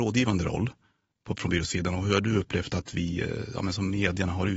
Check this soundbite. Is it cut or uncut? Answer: uncut